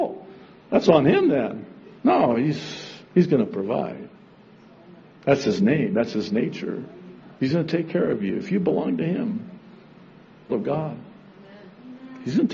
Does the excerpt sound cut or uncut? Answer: cut